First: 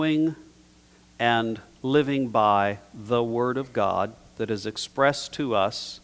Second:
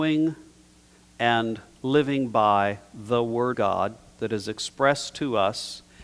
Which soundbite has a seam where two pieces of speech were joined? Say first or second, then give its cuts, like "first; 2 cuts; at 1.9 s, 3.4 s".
second; 1 cut; at 3.5 s